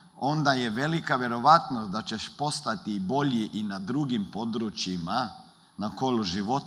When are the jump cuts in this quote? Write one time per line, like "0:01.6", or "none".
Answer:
none